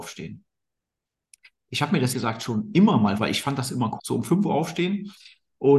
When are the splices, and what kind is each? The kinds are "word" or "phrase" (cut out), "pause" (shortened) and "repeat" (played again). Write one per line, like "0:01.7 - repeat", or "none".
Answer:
0:02.1 - word
0:03.2 - word
0:04.0 - word